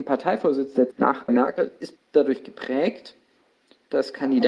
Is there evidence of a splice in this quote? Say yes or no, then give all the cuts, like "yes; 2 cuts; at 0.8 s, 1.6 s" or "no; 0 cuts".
yes; 3 cuts; at 0.9 s, 1.3 s, 2.0 s